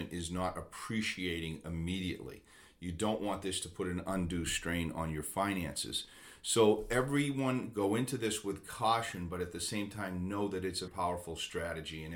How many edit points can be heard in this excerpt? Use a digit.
1